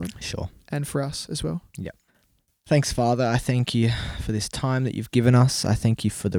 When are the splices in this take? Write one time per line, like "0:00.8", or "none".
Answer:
none